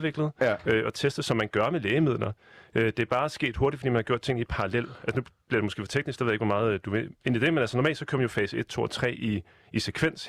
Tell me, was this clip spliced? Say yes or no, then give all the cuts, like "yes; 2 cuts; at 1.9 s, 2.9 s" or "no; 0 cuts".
no; 0 cuts